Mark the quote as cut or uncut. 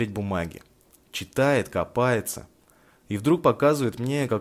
uncut